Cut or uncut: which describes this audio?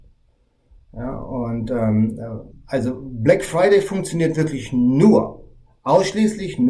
cut